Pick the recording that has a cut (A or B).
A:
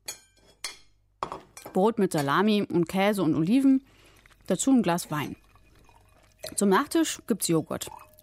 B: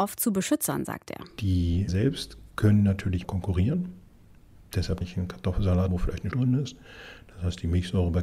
B